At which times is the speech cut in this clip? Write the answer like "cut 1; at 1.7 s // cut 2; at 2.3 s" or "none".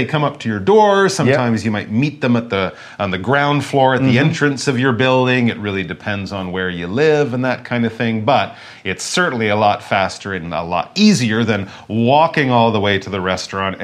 none